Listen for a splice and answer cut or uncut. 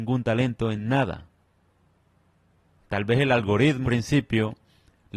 cut